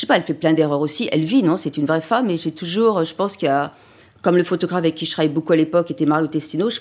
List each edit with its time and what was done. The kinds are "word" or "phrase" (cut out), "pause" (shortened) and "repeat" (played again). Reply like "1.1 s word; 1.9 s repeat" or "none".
none